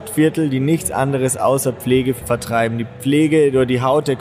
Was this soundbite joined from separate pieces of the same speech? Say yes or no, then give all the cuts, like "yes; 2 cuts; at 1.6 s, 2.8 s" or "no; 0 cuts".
yes; 1 cut; at 2.2 s